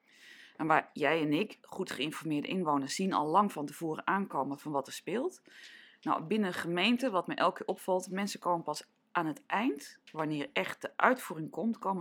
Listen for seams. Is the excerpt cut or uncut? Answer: uncut